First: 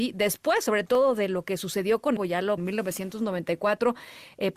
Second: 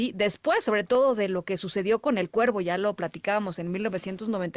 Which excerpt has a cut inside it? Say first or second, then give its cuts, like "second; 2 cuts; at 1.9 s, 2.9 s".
first; 2 cuts; at 2.2 s, 2.6 s